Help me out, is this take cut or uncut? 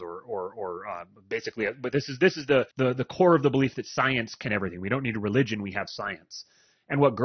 cut